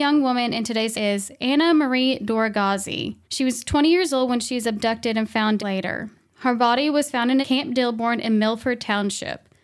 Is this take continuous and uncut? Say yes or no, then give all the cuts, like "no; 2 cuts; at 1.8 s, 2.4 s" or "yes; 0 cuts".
no; 4 cuts; at 0.9 s, 3.2 s, 5.6 s, 7.4 s